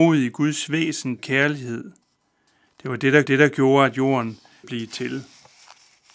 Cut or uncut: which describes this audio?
cut